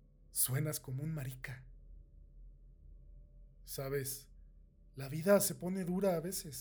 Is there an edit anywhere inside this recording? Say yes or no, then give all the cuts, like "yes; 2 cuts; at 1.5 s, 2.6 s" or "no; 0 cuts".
no; 0 cuts